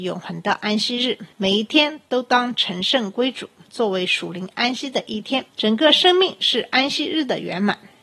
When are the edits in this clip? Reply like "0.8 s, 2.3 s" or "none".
5.5 s